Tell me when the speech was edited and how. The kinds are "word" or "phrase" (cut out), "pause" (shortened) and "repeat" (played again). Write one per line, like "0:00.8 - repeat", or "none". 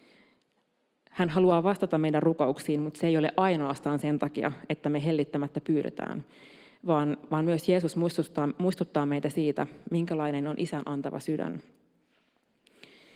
none